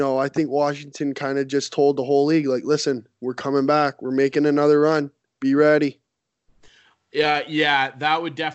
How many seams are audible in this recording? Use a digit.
0